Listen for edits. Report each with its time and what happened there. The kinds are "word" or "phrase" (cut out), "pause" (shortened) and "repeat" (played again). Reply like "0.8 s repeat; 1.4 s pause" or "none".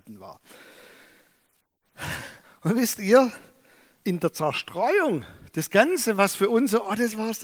2.4 s pause